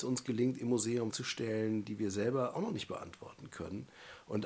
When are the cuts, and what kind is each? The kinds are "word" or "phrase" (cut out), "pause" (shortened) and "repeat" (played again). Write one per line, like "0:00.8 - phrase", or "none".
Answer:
0:01.1 - word